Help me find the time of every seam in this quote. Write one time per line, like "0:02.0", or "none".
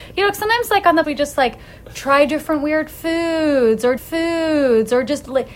0:01.0
0:04.0